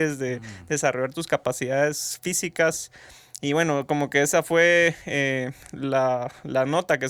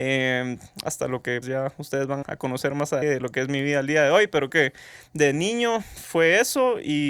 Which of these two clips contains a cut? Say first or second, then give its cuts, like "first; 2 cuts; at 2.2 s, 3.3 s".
second; 4 cuts; at 1.4 s, 2.2 s, 3.0 s, 4.5 s